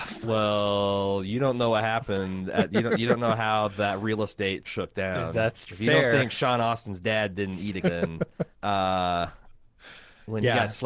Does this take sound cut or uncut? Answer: cut